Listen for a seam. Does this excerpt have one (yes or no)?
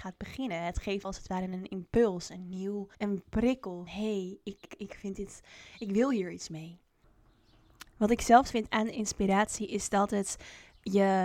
yes